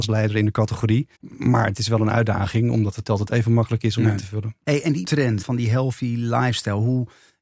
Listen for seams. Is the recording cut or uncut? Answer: cut